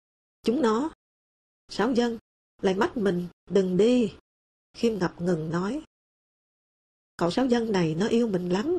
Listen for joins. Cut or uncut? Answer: uncut